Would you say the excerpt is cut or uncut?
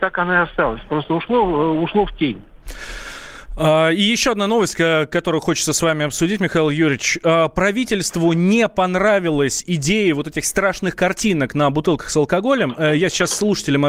uncut